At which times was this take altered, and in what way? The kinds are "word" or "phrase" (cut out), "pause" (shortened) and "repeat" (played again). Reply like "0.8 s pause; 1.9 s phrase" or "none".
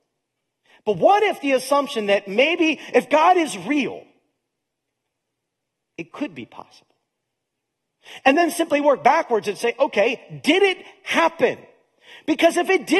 none